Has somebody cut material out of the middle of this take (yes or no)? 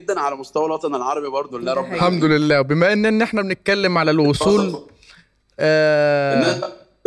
yes